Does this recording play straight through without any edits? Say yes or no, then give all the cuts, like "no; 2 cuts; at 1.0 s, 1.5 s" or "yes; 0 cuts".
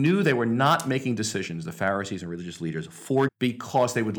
no; 1 cut; at 3.3 s